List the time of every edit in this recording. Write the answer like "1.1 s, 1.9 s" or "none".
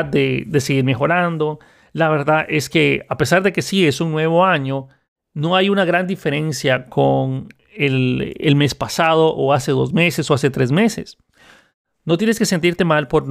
none